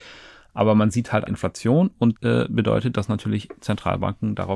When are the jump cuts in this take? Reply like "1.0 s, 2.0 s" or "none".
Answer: 1.3 s, 2.1 s